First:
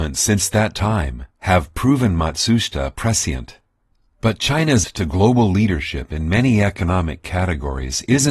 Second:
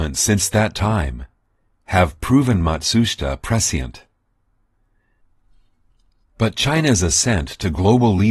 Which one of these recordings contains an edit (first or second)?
first